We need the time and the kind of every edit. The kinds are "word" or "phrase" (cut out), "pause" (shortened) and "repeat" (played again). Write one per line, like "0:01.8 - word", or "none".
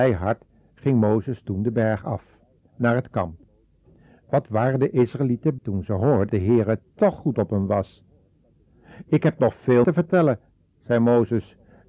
0:05.6 - word
0:06.3 - word
0:07.2 - word
0:09.8 - word